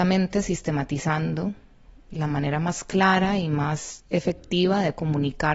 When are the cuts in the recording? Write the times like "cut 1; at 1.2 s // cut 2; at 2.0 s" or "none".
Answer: cut 1; at 2.1 s